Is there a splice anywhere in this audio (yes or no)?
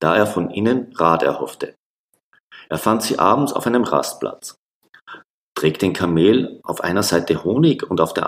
no